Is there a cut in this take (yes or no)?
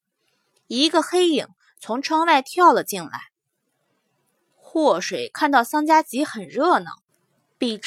no